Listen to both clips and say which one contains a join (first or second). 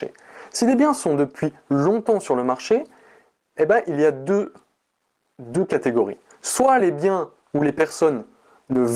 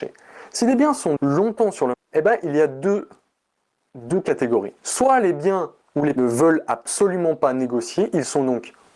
second